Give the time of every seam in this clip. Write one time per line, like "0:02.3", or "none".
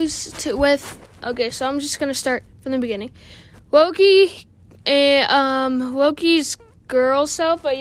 none